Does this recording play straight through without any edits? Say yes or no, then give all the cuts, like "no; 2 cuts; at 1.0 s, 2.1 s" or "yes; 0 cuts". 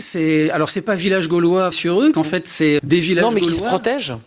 no; 3 cuts; at 1.7 s, 2.1 s, 2.8 s